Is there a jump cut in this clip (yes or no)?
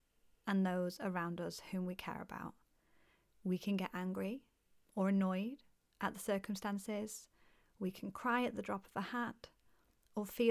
no